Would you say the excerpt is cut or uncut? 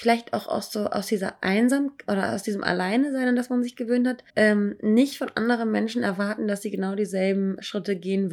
cut